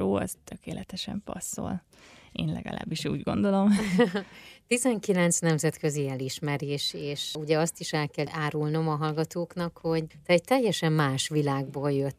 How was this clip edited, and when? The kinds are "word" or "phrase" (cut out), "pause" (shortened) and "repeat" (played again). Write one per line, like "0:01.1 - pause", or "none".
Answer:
none